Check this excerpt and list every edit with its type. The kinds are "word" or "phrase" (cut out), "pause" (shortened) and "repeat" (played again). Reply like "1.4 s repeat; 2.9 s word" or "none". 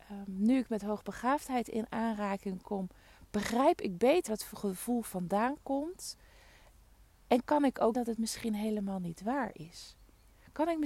4.3 s word; 7.9 s word

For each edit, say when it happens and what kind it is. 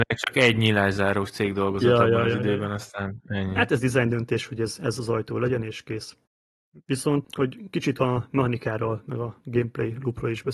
none

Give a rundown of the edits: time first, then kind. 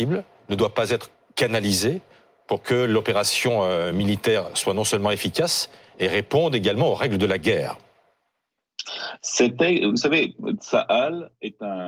none

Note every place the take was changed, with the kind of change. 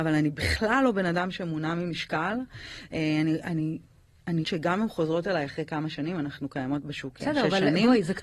4.4 s word

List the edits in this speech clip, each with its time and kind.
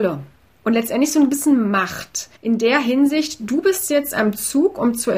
2.4 s pause

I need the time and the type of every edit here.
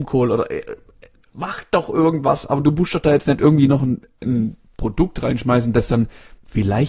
none

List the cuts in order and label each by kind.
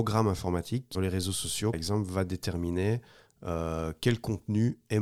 0.9 s word; 1.7 s word

